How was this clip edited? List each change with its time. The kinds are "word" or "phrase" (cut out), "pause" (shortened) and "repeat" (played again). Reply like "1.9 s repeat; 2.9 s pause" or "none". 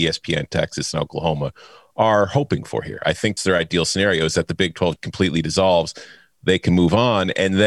3.4 s word; 5.0 s word